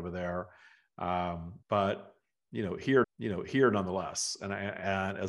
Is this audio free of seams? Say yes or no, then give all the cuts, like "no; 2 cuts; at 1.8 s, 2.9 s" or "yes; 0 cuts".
no; 2 cuts; at 1.6 s, 3.0 s